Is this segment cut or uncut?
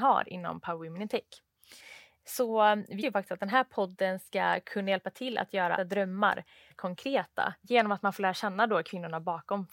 cut